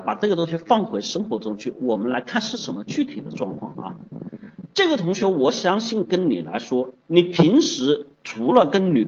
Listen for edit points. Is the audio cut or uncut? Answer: cut